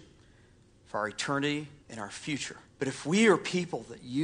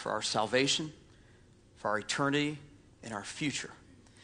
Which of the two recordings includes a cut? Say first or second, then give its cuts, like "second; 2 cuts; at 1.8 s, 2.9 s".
first; 2 cuts; at 1.8 s, 2.6 s